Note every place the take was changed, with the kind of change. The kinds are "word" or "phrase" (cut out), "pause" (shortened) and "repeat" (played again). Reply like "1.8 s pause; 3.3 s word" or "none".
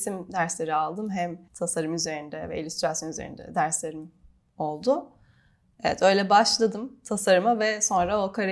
1.5 s word